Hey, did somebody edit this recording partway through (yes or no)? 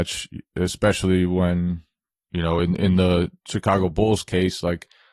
no